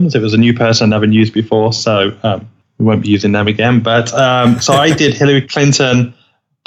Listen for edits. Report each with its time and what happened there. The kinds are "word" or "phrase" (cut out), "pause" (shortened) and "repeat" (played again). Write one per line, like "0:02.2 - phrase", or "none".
none